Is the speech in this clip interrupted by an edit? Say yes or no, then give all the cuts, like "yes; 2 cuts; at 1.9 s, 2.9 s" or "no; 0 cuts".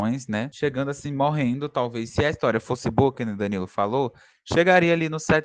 no; 0 cuts